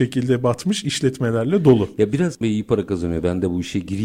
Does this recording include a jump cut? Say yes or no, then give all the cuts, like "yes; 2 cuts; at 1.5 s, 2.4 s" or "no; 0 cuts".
yes; 1 cut; at 2.4 s